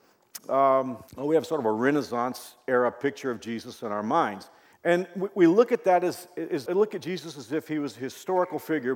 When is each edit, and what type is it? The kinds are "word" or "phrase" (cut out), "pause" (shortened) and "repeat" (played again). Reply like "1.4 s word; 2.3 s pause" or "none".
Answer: 1.1 s pause; 4.7 s pause; 6.7 s word